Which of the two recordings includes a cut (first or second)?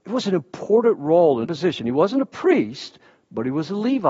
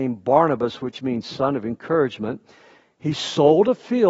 first